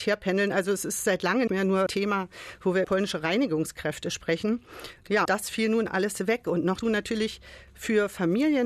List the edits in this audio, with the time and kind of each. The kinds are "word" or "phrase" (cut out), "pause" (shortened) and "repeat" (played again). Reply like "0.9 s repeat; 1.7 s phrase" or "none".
1.5 s word; 1.9 s word; 2.8 s word; 5.3 s word; 6.8 s word